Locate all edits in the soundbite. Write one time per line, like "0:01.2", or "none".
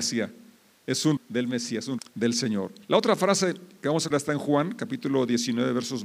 0:01.2
0:02.0
0:02.8
0:04.1